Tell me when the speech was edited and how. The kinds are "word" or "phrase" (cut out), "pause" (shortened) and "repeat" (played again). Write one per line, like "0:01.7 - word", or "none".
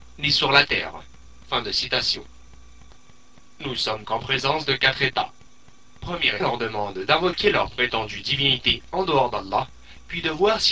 0:04.0 - word
0:06.4 - phrase